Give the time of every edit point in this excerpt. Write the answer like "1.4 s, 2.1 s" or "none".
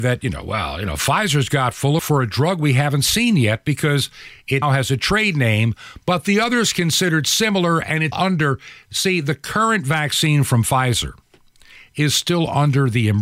2.0 s, 4.6 s, 8.1 s

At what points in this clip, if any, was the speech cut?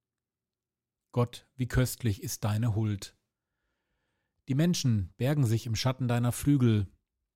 none

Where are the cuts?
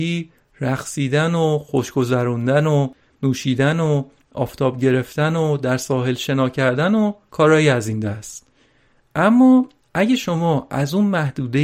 none

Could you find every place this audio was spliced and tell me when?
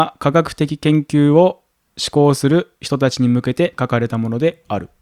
none

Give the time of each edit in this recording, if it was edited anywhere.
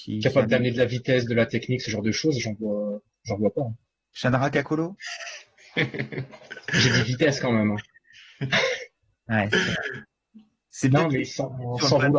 none

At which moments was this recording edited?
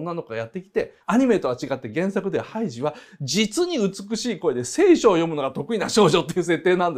1.0 s

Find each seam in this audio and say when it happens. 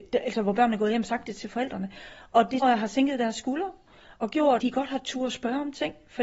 2.6 s, 4.6 s

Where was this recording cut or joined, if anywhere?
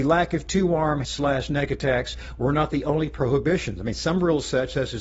1.0 s

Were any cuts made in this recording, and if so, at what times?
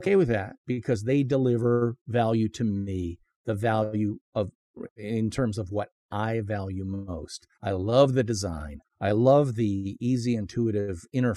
7.5 s, 8.9 s

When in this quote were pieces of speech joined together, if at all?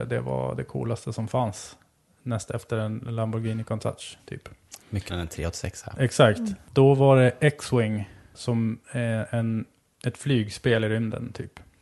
5.1 s

